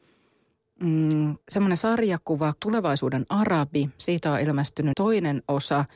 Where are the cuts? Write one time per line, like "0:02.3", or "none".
0:01.4
0:02.6
0:04.9